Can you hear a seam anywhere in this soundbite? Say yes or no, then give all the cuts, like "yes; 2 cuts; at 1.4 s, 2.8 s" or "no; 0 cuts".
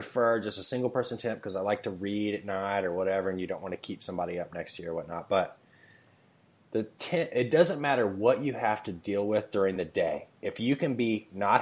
no; 0 cuts